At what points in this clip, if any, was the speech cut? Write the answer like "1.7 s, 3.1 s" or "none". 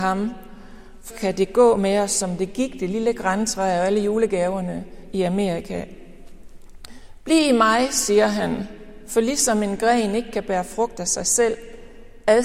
1.1 s

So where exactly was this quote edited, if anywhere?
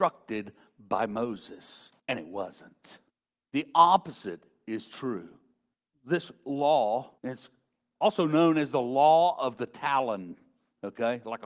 2.0 s, 3.1 s, 5.7 s, 7.2 s

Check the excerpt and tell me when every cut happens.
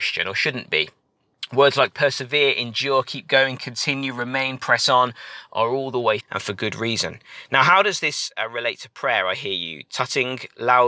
6.2 s

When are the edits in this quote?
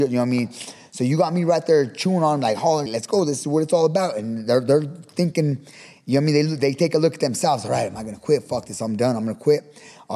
2.9 s

